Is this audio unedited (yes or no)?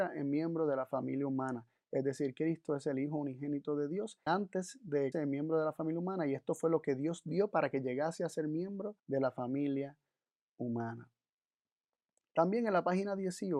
no